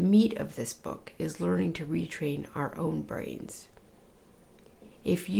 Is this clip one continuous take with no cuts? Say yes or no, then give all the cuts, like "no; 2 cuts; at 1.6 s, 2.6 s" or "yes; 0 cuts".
yes; 0 cuts